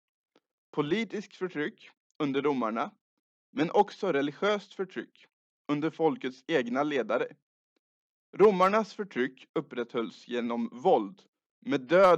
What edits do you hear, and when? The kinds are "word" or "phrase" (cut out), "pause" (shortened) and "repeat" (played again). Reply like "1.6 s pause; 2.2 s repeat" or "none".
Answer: none